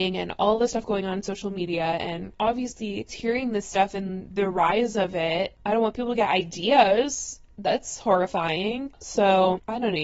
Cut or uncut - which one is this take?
cut